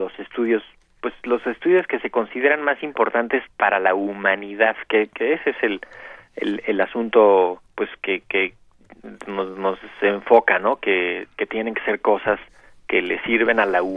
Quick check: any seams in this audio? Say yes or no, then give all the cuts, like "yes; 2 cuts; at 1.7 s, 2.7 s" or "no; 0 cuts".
yes; 1 cut; at 7.7 s